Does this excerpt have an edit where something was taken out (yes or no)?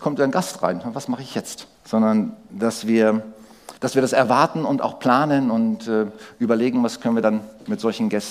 yes